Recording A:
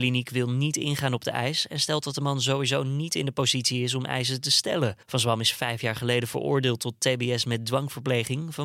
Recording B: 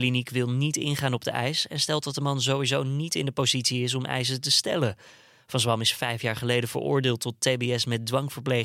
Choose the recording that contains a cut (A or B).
A